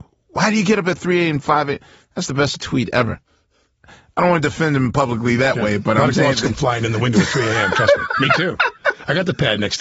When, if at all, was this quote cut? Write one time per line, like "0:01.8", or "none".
0:02.5
0:06.1